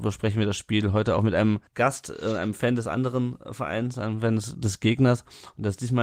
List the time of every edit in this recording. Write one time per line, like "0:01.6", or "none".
0:01.7